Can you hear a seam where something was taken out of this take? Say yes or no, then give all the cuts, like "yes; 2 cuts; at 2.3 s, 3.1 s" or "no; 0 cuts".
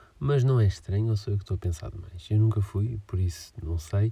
no; 0 cuts